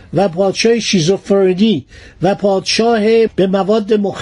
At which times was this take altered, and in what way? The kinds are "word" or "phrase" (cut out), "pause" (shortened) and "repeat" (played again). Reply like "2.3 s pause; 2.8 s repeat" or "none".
3.3 s word

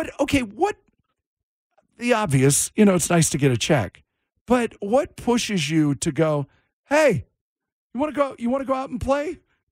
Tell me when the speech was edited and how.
none

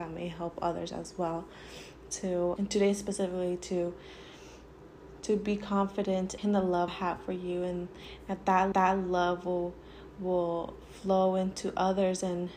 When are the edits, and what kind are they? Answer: 2.6 s word; 6.4 s word; 6.9 s phrase; 8.7 s repeat

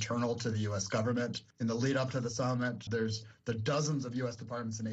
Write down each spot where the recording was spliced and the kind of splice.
1.5 s pause; 2.9 s word

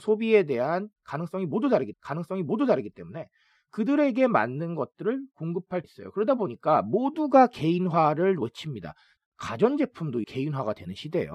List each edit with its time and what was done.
1.9 s repeat; 5.8 s word; 9.2 s word; 10.2 s word

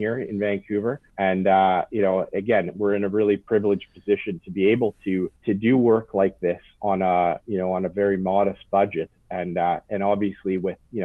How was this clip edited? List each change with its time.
1.1 s pause; 5.4 s pause

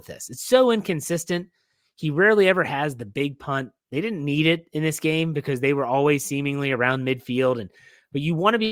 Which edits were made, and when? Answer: none

